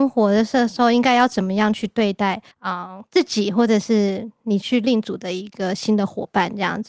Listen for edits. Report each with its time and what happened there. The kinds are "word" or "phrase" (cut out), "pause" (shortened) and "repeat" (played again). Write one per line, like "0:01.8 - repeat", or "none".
0:02.5 - pause